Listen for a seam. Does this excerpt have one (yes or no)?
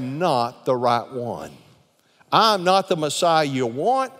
no